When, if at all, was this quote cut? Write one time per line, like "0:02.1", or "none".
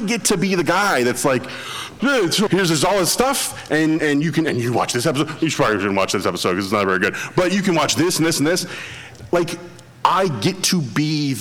0:02.0
0:02.5
0:04.0